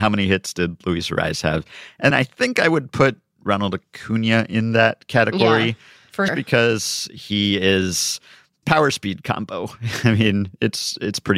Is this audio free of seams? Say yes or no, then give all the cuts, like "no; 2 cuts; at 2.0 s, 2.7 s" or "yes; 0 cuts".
no; 3 cuts; at 2.1 s, 6.3 s, 8.6 s